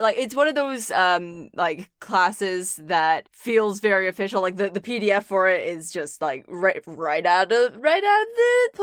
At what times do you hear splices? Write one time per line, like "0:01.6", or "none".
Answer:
none

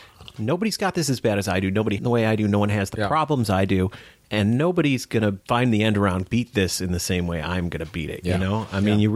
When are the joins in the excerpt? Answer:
0:02.0
0:05.4

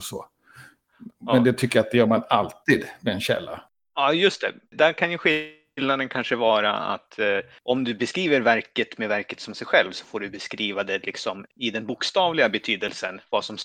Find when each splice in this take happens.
none

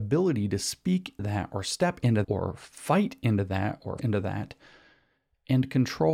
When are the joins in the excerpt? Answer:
0:01.2
0:02.2
0:04.0

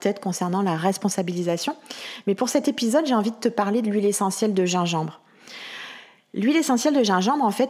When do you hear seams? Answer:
none

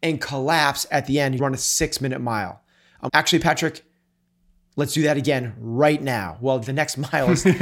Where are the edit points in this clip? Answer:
0:01.4
0:03.1

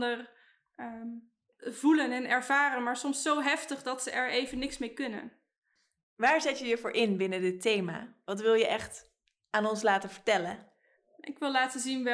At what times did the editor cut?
none

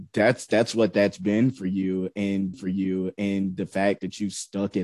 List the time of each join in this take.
0:02.5

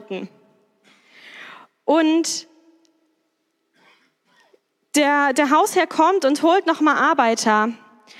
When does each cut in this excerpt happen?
none

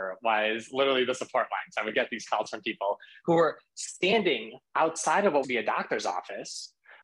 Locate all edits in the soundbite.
0:05.4

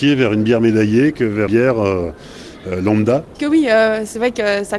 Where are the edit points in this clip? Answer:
0:01.5
0:03.4

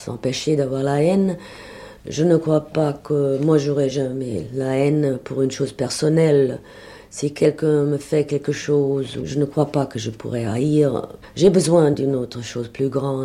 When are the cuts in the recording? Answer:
none

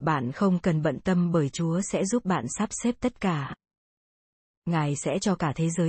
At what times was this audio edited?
none

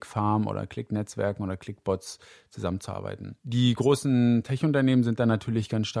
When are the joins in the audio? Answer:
0:03.4

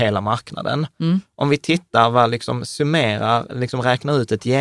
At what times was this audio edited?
none

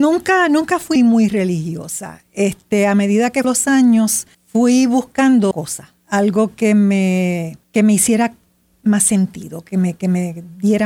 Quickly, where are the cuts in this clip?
0:01.0
0:03.4
0:04.3
0:05.5
0:06.0
0:07.6

